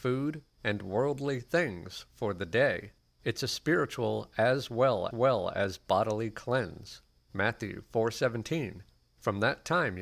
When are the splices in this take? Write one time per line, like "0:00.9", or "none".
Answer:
0:03.0
0:05.1
0:07.2
0:08.9